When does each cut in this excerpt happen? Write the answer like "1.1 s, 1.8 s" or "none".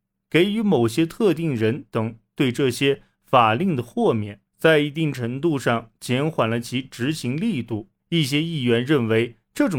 4.5 s, 8.0 s